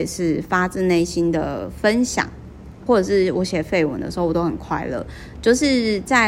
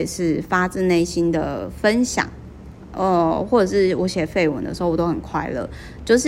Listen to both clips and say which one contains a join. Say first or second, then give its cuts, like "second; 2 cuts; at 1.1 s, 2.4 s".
first; 1 cut; at 2.9 s